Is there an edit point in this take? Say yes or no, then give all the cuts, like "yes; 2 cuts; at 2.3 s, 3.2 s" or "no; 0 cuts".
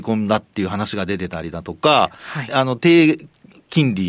yes; 1 cut; at 2.5 s